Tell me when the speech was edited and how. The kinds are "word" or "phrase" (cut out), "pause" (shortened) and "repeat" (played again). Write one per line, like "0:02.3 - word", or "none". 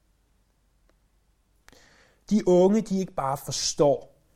none